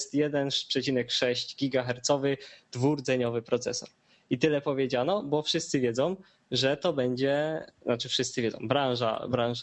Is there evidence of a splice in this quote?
no; 0 cuts

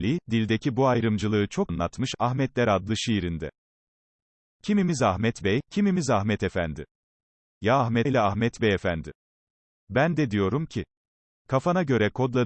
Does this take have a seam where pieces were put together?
yes; 2 cuts; at 1.7 s, 8.0 s

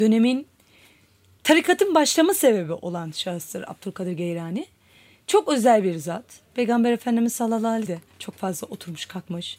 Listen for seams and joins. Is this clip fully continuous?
no; 1 cut; at 7.9 s

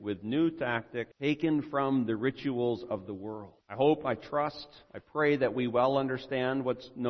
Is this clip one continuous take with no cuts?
no; 2 cuts; at 1.1 s, 3.6 s

